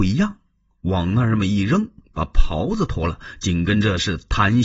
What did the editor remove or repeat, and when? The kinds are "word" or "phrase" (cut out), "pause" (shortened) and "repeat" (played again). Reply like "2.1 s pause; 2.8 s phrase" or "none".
none